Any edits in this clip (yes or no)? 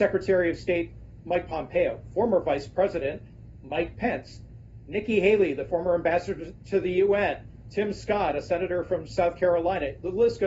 no